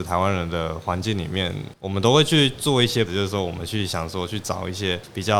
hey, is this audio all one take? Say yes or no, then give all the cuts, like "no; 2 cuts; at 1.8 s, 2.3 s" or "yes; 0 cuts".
no; 1 cut; at 3.1 s